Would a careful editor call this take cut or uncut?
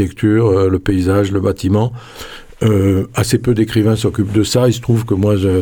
uncut